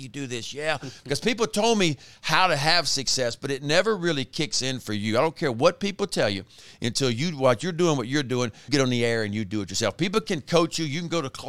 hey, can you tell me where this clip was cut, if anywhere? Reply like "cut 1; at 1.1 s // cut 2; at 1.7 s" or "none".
cut 1; at 8.7 s